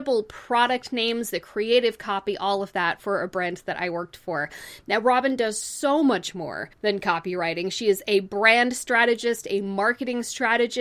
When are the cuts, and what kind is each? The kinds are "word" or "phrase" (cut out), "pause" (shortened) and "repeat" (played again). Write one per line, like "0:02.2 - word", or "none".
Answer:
0:06.7 - pause